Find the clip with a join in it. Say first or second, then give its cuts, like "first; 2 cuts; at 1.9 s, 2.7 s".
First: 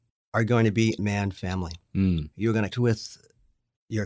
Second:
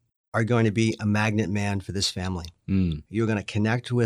first; 3 cuts; at 1.0 s, 1.4 s, 2.7 s